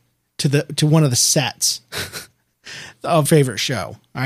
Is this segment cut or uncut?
cut